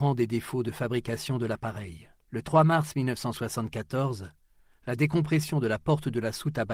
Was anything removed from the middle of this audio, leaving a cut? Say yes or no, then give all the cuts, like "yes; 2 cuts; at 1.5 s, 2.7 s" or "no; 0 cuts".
yes; 2 cuts; at 2.2 s, 4.5 s